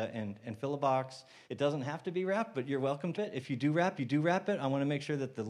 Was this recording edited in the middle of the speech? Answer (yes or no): yes